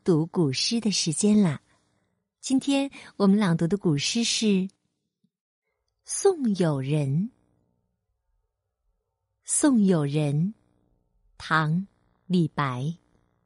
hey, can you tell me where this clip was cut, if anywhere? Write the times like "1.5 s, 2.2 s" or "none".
none